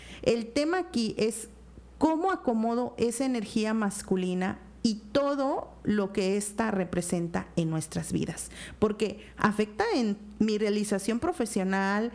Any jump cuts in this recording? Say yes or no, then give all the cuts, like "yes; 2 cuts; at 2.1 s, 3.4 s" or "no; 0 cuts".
no; 0 cuts